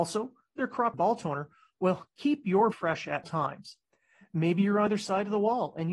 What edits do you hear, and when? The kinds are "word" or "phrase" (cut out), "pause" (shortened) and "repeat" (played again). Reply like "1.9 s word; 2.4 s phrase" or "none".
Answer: 0.9 s word; 2.7 s word; 3.2 s word; 4.9 s word

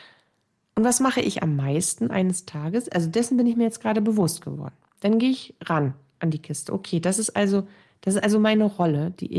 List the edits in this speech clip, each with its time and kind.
none

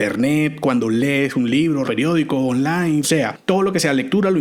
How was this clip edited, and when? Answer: 1.8 s word; 3.0 s phrase

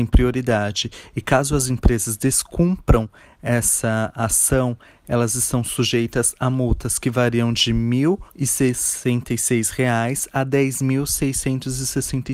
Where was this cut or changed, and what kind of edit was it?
8.3 s pause

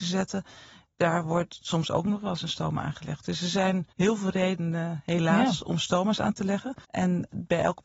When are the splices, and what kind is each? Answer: 3.9 s pause; 6.8 s pause

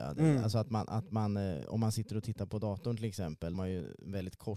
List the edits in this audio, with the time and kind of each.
3.5 s phrase

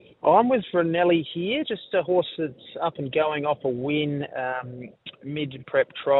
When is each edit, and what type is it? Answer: none

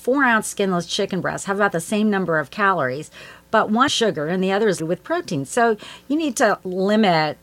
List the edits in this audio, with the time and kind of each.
3.9 s phrase; 4.8 s word

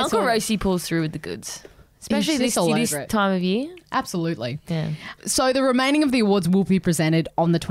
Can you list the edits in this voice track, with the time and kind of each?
3.1 s word; 5.2 s word

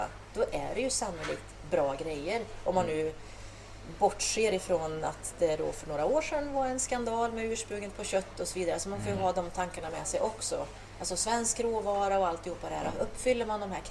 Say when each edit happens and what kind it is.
none

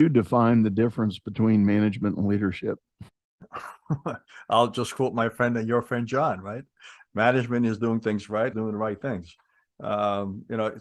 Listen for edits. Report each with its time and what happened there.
3.1 s pause; 8.5 s phrase

